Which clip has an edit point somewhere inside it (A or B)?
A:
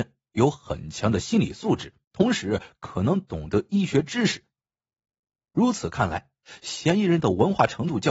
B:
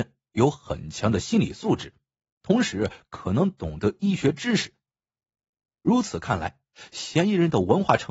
A